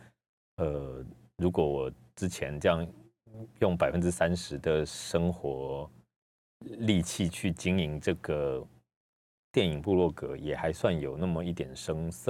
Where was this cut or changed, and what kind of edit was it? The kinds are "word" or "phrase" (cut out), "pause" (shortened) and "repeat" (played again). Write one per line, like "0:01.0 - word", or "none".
none

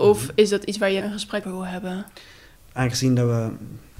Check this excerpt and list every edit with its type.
0:01.0 - word
0:01.4 - word

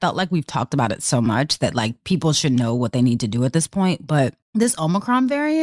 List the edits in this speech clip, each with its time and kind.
none

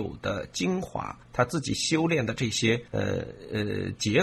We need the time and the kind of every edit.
0:01.2 - pause
0:02.9 - pause

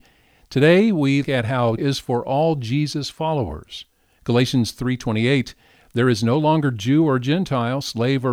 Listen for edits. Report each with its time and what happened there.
0:01.2 - word
0:01.8 - word

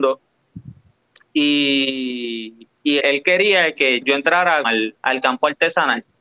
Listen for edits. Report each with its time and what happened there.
0:03.0 - word
0:04.0 - word
0:04.6 - word
0:05.0 - pause

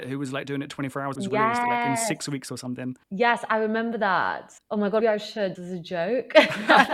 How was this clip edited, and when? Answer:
0:01.1 - phrase
0:03.0 - pause
0:04.6 - pause
0:05.0 - word
0:05.5 - word

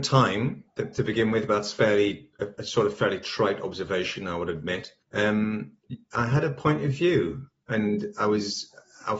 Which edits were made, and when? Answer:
0:05.0 - pause

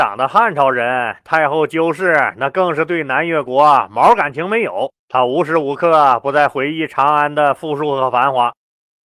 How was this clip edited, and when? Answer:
0:05.0 - pause

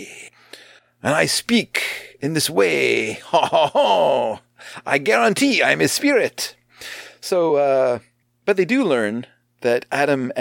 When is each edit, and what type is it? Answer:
none

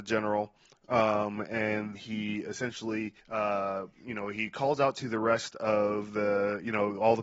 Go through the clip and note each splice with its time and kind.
0:01.9 - word
0:03.2 - pause

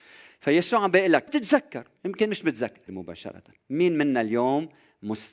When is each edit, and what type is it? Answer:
0:01.3 - word
0:02.9 - phrase

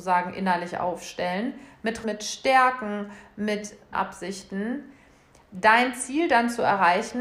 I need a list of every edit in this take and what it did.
0:02.0 - word
0:03.9 - word

